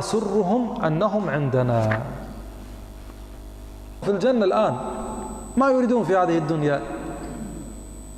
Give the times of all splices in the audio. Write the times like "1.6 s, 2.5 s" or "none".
4.0 s

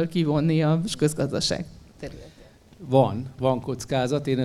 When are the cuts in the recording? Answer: none

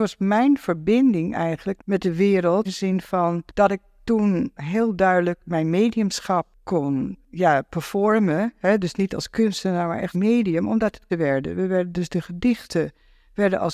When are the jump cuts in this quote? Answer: 1.8 s, 2.7 s, 10.1 s, 11.1 s

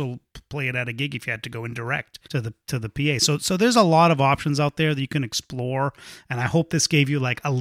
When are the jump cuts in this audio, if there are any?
2.2 s

